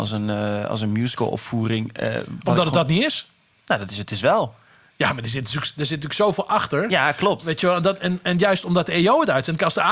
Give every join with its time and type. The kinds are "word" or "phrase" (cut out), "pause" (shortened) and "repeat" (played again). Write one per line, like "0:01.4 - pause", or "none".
none